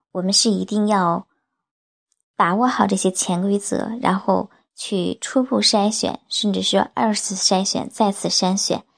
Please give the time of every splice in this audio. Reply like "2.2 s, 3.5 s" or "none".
none